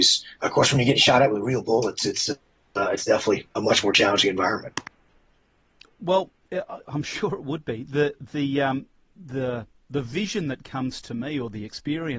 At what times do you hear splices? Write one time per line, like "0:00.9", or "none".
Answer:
none